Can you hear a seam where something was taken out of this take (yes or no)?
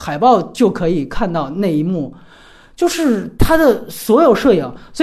no